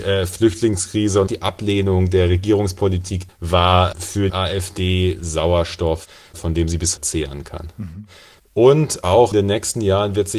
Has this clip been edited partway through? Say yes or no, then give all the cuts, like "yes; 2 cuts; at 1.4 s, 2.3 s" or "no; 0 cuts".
yes; 5 cuts; at 1.3 s, 3.3 s, 4.3 s, 7.0 s, 9.3 s